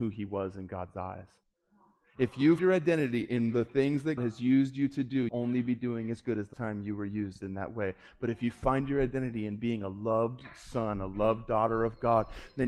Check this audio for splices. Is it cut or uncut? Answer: cut